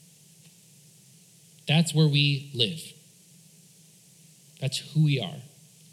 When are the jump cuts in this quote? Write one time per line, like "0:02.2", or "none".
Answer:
none